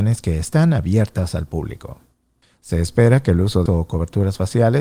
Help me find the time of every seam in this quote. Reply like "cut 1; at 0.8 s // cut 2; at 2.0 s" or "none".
cut 1; at 2.4 s // cut 2; at 3.7 s

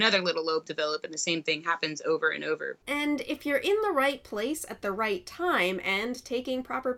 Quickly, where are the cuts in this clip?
cut 1; at 2.8 s

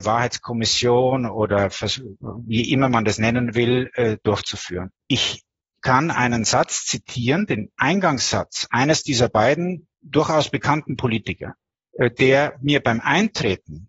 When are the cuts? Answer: cut 1; at 5.0 s // cut 2; at 9.9 s // cut 3; at 11.7 s

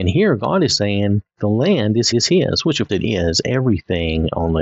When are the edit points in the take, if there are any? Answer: cut 1; at 1.3 s // cut 2; at 2.1 s // cut 3; at 2.9 s

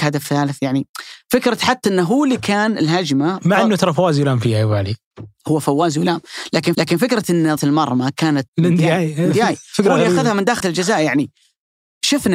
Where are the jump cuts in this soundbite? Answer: cut 1; at 6.7 s // cut 2; at 7.6 s // cut 3; at 8.5 s // cut 4; at 10.6 s

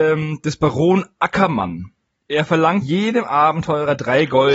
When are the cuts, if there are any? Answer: cut 1; at 2.8 s

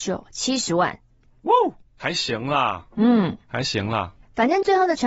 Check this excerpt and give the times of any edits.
none

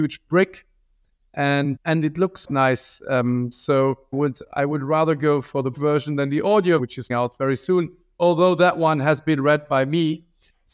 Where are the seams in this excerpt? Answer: cut 1; at 1.8 s // cut 2; at 2.5 s // cut 3; at 4.1 s // cut 4; at 5.7 s // cut 5; at 6.8 s // cut 6; at 7.1 s

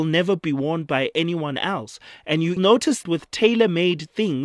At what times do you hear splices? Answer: cut 1; at 2.6 s // cut 2; at 3.0 s

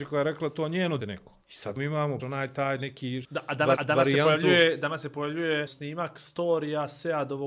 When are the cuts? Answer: cut 1; at 1.0 s // cut 2; at 1.4 s // cut 3; at 1.8 s // cut 4; at 2.2 s // cut 5; at 3.2 s // cut 6; at 3.7 s // cut 7; at 5.7 s

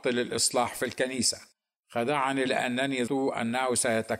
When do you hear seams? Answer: cut 1; at 2.4 s // cut 2; at 3.1 s

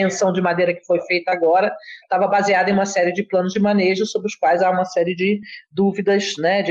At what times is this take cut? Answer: none

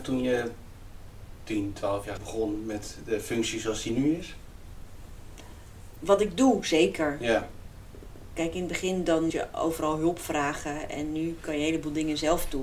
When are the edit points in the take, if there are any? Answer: cut 1; at 2.2 s // cut 2; at 9.3 s

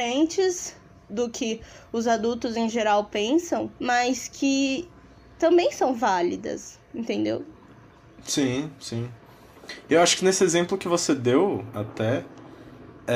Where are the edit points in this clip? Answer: cut 1; at 1.1 s // cut 2; at 3.8 s

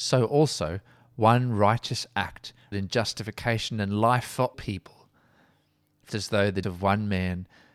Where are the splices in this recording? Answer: cut 1; at 2.7 s // cut 2; at 4.5 s // cut 3; at 6.1 s // cut 4; at 6.6 s

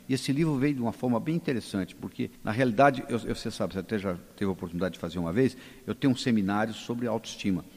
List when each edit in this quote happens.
cut 1; at 2.4 s

